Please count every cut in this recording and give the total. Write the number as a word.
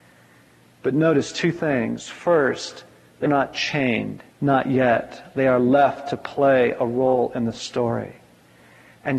two